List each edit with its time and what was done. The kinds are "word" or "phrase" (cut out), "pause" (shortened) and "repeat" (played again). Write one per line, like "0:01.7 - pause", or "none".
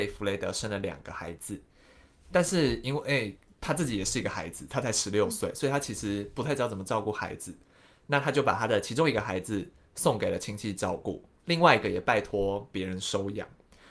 none